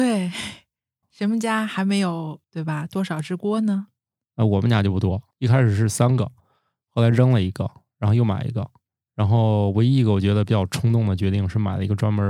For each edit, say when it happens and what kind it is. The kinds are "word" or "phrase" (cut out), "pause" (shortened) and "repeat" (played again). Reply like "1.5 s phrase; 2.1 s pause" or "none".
1.0 s word; 2.4 s pause